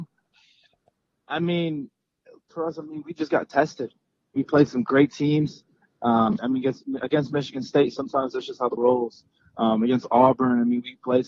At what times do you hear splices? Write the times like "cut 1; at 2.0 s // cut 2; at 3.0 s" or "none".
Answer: cut 1; at 2.5 s // cut 2; at 4.4 s // cut 3; at 6.4 s // cut 4; at 8.8 s